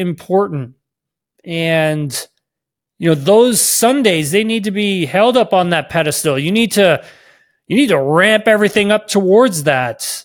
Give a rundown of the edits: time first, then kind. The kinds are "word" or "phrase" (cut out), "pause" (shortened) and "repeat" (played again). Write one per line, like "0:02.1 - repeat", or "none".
none